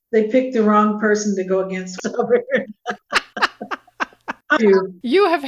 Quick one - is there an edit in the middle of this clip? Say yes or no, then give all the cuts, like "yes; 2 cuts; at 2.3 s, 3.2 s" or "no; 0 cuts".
yes; 2 cuts; at 2.0 s, 4.6 s